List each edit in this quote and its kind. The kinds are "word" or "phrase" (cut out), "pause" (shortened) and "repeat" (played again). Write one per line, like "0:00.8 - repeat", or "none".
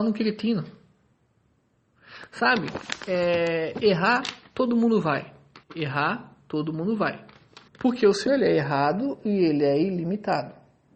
0:05.6 - pause
0:07.7 - pause
0:08.3 - word